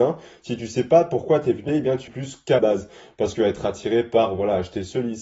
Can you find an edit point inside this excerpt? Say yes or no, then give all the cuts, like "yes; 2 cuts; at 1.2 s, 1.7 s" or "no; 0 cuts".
yes; 4 cuts; at 1.7 s, 2.1 s, 2.6 s, 3.4 s